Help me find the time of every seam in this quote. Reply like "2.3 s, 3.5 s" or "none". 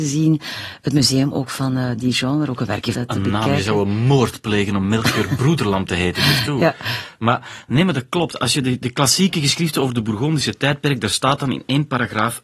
2.9 s